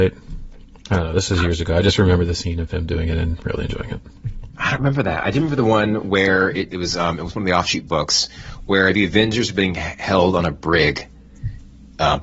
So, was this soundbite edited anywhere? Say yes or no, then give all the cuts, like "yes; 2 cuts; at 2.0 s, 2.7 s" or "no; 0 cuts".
no; 0 cuts